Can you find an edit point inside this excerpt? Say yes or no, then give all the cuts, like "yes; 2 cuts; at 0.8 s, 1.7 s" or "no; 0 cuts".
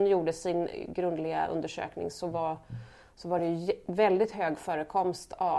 no; 0 cuts